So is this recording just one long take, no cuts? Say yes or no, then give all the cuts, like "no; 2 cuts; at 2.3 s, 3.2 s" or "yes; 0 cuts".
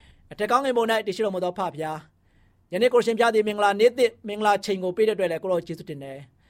yes; 0 cuts